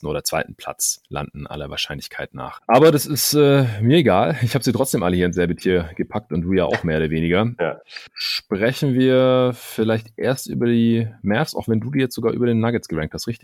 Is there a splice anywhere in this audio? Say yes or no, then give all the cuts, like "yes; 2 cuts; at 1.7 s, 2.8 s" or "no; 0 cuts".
no; 0 cuts